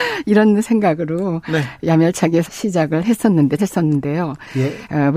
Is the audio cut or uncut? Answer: cut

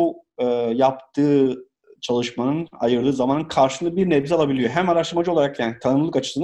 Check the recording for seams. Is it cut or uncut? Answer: uncut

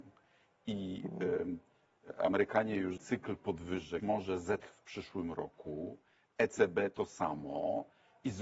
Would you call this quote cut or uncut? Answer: cut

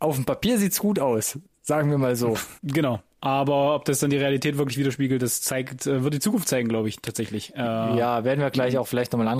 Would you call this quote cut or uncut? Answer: cut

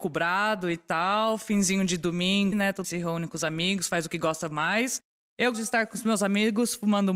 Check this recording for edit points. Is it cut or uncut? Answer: cut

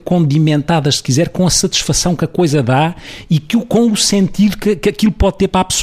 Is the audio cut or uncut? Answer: uncut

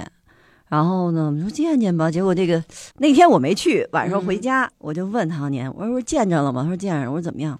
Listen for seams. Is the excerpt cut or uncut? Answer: cut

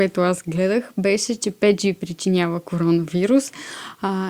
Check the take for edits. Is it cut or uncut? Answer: uncut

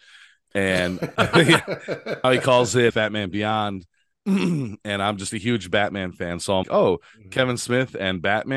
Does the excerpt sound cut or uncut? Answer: cut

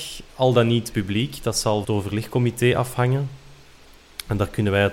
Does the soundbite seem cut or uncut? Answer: cut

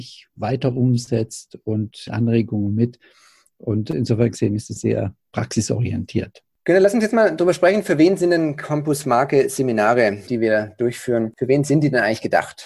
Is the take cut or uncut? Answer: cut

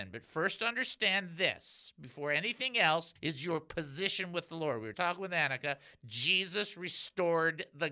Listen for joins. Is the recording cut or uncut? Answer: cut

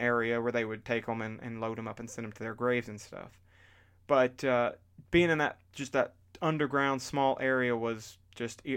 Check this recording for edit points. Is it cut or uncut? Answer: uncut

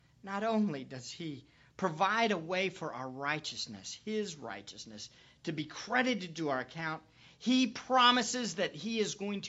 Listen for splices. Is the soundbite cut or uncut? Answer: uncut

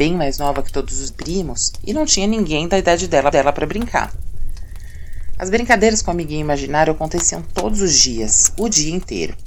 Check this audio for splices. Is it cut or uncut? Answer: cut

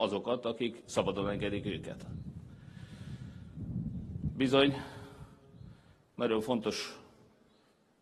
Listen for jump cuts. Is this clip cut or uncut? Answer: uncut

